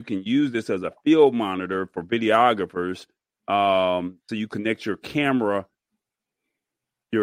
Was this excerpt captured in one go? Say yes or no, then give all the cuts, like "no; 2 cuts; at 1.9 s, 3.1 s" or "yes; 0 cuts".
yes; 0 cuts